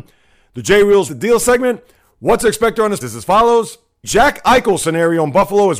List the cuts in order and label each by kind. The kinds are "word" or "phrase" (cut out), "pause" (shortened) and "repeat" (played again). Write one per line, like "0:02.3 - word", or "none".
0:01.1 - word
0:03.0 - word
0:04.0 - word